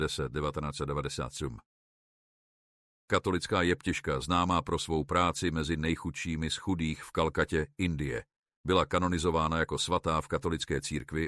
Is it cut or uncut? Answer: uncut